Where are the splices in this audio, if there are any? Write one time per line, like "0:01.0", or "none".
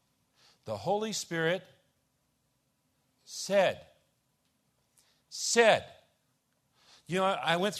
none